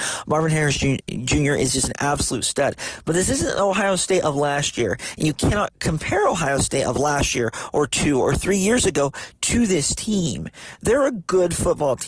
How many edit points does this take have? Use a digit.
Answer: 0